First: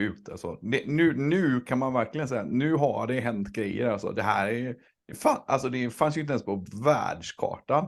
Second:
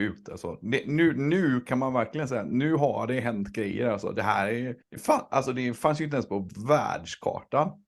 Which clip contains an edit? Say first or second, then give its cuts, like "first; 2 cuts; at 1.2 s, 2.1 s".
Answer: second; 1 cut; at 4.8 s